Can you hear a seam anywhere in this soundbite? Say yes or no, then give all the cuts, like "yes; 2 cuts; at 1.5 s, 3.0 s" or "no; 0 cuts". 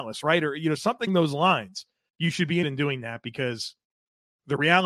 yes; 3 cuts; at 1.1 s, 2.1 s, 2.6 s